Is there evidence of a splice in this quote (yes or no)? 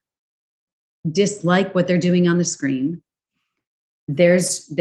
no